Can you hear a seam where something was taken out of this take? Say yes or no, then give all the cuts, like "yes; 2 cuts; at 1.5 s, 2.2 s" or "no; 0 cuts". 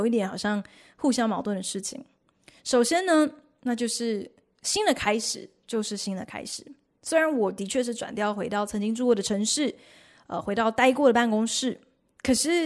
no; 0 cuts